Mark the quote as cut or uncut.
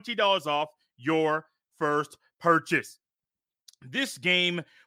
uncut